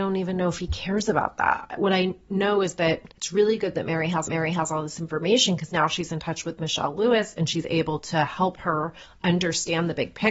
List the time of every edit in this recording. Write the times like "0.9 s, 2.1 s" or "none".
3.1 s, 4.3 s